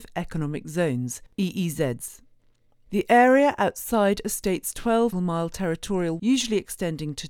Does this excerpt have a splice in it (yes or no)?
yes